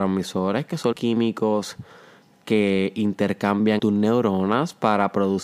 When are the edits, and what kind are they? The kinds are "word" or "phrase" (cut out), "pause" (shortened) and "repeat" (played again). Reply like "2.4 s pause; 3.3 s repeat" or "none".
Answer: 0.9 s word; 3.8 s word